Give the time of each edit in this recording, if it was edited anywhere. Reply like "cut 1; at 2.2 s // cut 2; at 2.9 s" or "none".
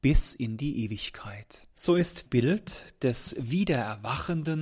cut 1; at 1.7 s // cut 2; at 2.3 s